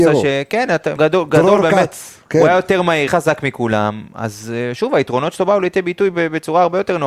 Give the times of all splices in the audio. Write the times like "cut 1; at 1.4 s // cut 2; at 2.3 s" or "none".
cut 1; at 1.0 s // cut 2; at 3.1 s